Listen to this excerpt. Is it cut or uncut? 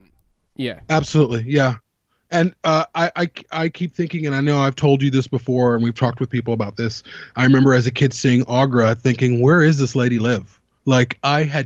uncut